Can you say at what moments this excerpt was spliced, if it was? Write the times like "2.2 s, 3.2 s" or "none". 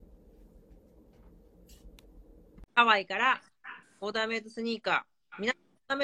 2.7 s, 3.8 s